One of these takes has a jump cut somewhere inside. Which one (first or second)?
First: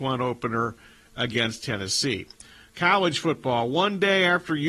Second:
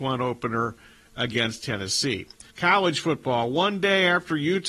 second